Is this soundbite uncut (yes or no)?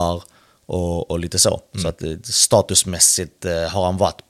yes